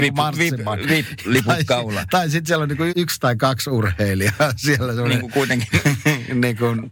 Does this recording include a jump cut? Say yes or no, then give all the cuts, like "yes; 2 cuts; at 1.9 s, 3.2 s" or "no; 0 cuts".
yes; 2 cuts; at 1.2 s, 2.9 s